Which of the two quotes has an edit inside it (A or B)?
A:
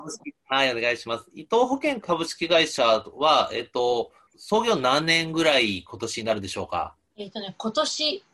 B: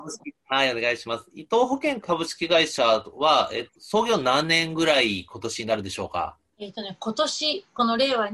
B